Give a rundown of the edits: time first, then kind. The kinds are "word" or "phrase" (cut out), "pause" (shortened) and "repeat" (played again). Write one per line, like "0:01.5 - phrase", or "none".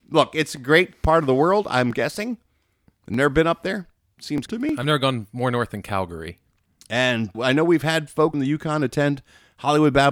0:04.5 - word
0:07.3 - word
0:08.3 - word